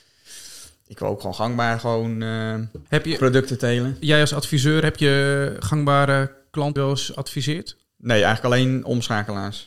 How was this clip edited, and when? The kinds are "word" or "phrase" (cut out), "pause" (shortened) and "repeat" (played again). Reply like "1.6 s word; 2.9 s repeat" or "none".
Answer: 2.9 s pause; 3.2 s word; 6.8 s phrase; 7.9 s pause